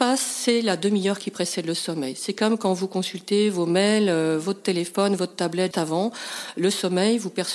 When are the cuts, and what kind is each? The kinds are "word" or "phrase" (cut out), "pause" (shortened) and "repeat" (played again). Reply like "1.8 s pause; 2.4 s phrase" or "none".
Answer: 5.7 s word